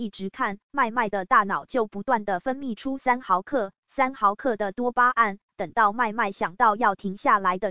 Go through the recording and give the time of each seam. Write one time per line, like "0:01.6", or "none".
0:03.8

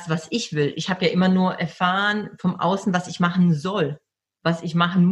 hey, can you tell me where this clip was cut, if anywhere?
0:04.1

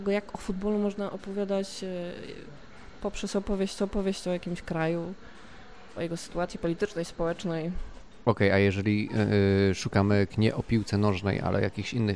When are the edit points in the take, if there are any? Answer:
0:03.8
0:06.0
0:10.3

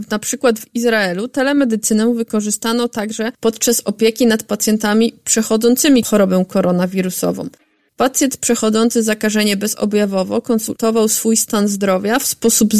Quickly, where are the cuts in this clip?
none

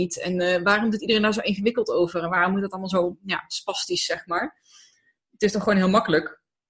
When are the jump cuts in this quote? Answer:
none

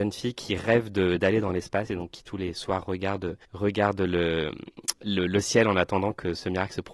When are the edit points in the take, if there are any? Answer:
0:03.4

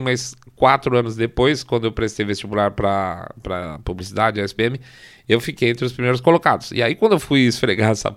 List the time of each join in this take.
none

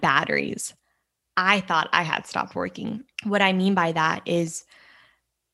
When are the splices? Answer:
0:03.1

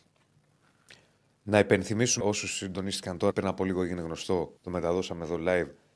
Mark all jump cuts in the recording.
0:02.2
0:03.3
0:04.6

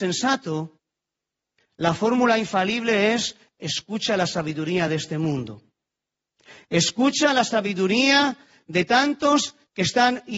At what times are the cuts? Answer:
none

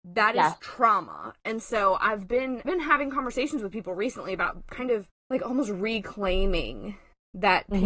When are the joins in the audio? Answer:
0:02.6
0:05.2

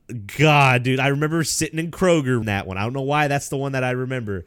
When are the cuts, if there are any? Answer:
0:02.4

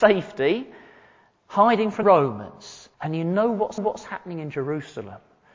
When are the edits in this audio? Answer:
0:02.0
0:02.9
0:03.8

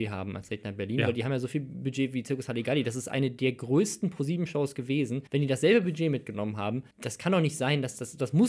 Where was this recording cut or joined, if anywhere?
0:05.3
0:06.9

